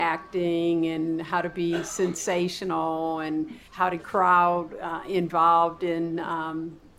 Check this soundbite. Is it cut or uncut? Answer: cut